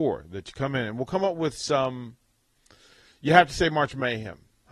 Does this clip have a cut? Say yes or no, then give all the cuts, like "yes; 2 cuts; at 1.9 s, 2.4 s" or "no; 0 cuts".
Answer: no; 0 cuts